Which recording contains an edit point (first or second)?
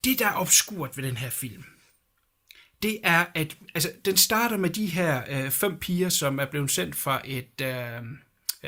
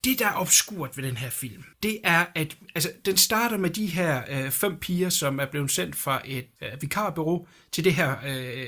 second